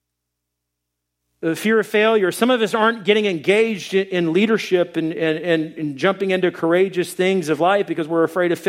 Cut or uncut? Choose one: uncut